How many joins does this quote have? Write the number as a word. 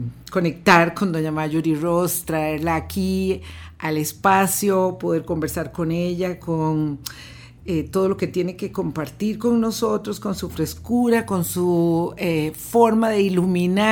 zero